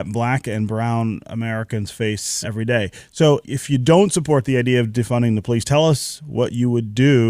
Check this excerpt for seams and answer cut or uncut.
cut